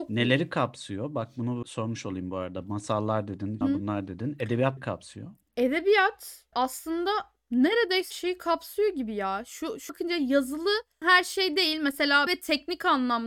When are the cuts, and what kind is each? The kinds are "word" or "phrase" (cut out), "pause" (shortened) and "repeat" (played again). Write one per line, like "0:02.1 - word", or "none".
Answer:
0:01.6 - word
0:03.6 - word
0:04.8 - word
0:06.5 - word
0:08.1 - word
0:09.9 - word
0:11.0 - word
0:12.3 - word

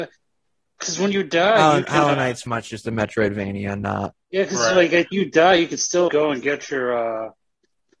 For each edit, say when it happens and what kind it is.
0:02.5 - word
0:04.2 - pause
0:05.1 - word
0:06.1 - word

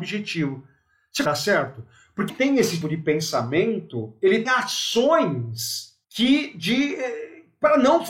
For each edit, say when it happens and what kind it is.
0:01.3 - phrase
0:02.3 - phrase
0:02.8 - word
0:04.5 - word
0:06.0 - pause

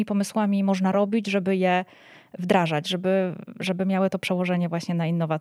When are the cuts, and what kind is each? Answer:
none

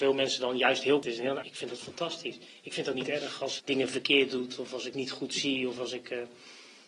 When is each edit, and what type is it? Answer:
0:01.0 - word
0:01.4 - word
0:02.9 - word
0:03.6 - word
0:04.9 - word

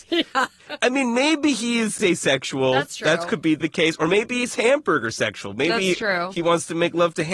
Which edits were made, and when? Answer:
none

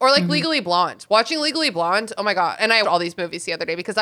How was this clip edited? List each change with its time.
0:02.8 - word

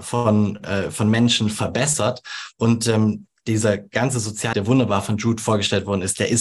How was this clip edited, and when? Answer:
0:04.5 - word

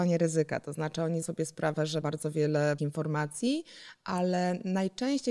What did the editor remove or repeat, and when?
0:01.2 - word
0:02.0 - word
0:02.8 - word

